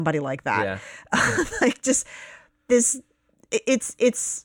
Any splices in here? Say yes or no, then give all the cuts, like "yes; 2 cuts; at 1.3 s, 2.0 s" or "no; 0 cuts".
no; 0 cuts